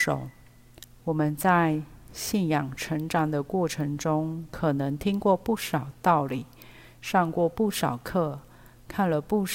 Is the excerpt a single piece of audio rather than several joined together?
yes; 0 cuts

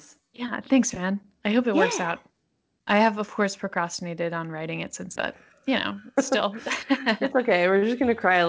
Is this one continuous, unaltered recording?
no; 1 cut; at 5.2 s

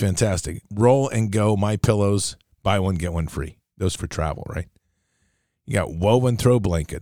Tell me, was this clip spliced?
yes; 1 cut; at 4.0 s

